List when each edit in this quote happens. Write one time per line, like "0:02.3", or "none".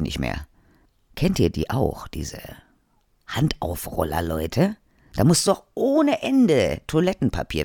none